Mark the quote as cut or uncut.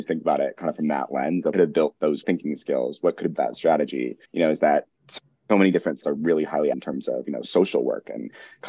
cut